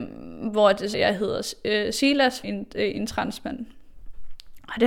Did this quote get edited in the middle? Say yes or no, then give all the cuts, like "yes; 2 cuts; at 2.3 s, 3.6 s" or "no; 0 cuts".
yes; 2 cuts; at 0.9 s, 2.4 s